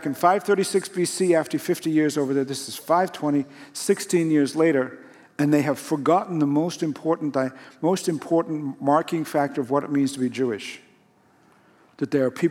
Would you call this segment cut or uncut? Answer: uncut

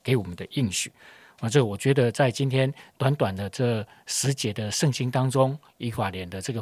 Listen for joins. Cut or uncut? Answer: uncut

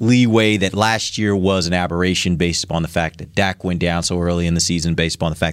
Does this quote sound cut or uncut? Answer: uncut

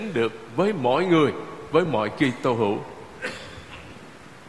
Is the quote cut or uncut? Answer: uncut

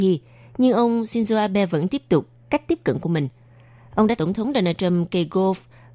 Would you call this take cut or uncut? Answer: cut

